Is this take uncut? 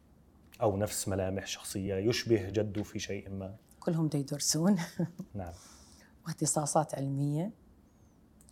yes; 0 cuts

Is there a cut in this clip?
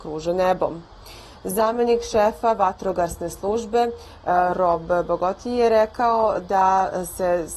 no; 0 cuts

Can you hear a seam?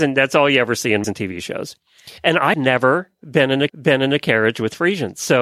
yes; 4 cuts; at 1.0 s, 2.2 s, 2.5 s, 3.7 s

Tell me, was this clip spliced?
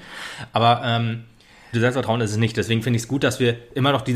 yes; 1 cut; at 1.7 s

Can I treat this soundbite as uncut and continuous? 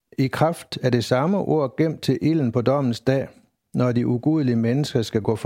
yes; 0 cuts

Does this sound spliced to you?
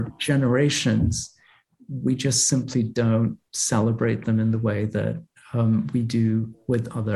no; 0 cuts

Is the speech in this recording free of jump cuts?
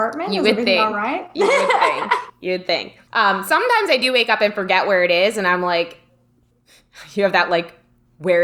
no; 1 cut; at 3.0 s

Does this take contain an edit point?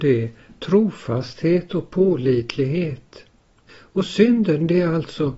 no; 0 cuts

